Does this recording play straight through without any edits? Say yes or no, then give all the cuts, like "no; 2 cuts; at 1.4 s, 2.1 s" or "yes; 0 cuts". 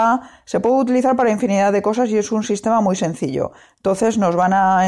yes; 0 cuts